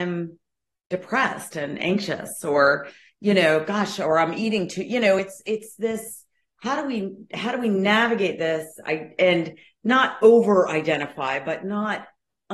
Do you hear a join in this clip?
no; 0 cuts

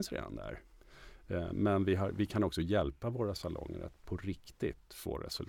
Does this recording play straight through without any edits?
yes; 0 cuts

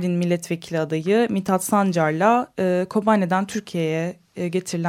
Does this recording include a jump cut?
no; 0 cuts

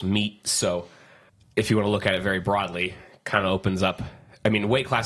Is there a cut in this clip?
no; 0 cuts

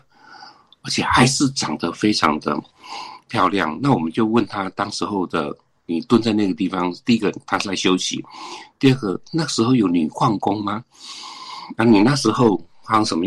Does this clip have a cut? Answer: no; 0 cuts

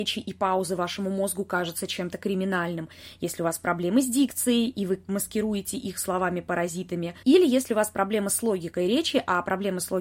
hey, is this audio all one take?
no; 1 cut; at 7.2 s

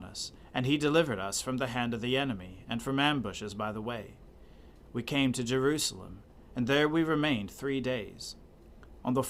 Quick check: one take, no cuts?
yes; 0 cuts

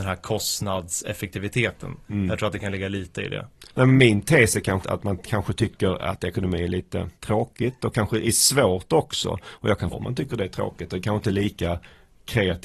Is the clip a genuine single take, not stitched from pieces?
no; 5 cuts; at 2.0 s, 3.7 s, 4.8 s, 7.2 s, 9.9 s

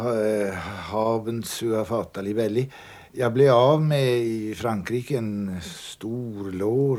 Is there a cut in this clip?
no; 0 cuts

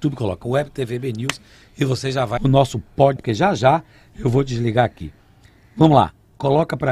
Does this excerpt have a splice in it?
yes; 2 cuts; at 2.4 s, 3.2 s

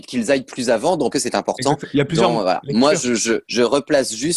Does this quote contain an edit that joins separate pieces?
yes; 2 cuts; at 1.1 s, 3.4 s

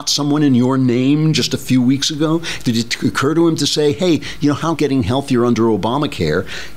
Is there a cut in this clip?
yes; 1 cut; at 4.8 s

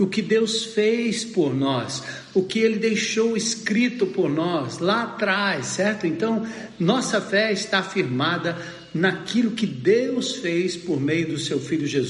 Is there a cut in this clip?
no; 0 cuts

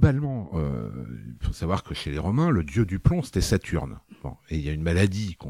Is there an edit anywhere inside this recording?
no; 0 cuts

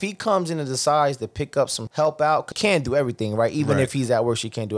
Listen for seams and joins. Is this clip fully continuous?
no; 2 cuts; at 1.9 s, 2.5 s

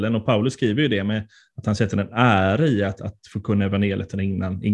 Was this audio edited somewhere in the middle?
no; 0 cuts

